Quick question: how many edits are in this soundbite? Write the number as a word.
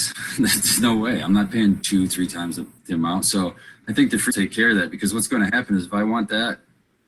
one